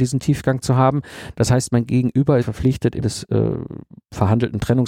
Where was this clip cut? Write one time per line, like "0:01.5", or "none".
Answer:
0:02.4
0:03.0